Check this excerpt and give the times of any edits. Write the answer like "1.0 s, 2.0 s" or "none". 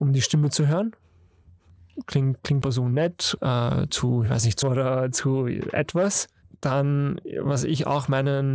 2.6 s, 3.4 s, 3.9 s, 4.6 s